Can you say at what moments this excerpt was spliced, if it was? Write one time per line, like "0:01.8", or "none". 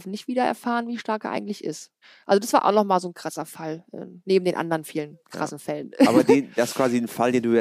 0:02.0
0:04.2